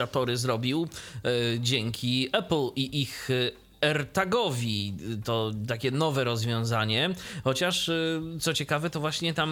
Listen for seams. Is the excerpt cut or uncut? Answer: uncut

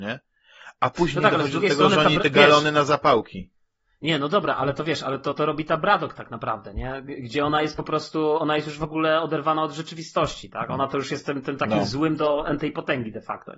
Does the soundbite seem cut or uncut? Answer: uncut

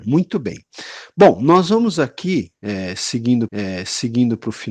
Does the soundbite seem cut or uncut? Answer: cut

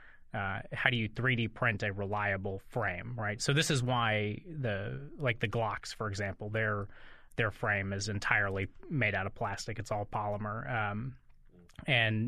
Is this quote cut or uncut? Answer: uncut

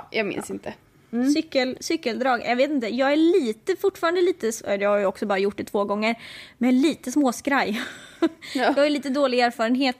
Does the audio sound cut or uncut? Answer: uncut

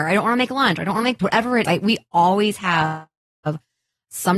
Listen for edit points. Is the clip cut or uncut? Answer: cut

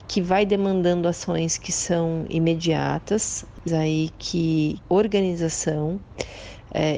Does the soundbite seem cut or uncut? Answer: cut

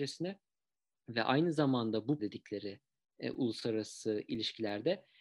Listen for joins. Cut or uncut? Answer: cut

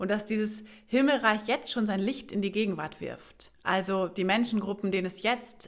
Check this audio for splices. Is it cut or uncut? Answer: cut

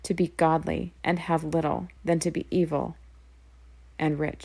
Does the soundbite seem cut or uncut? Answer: cut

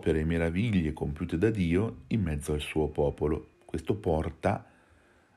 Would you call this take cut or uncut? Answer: cut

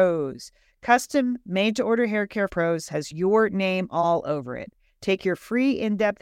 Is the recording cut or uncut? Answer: cut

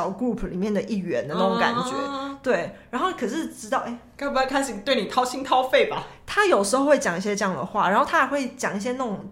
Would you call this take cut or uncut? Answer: uncut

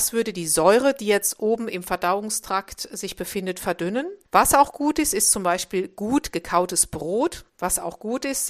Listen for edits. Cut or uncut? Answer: cut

